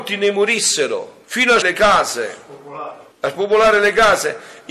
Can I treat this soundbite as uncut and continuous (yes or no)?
no